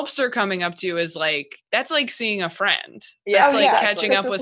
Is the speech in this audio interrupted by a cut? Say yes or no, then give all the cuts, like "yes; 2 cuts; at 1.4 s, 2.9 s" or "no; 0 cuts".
yes; 1 cut; at 1.7 s